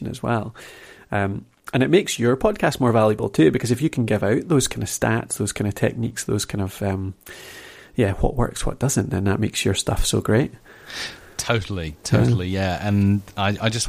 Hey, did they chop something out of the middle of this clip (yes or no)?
no